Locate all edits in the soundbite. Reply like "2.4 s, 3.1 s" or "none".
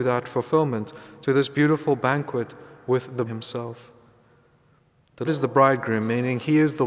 3.3 s, 5.3 s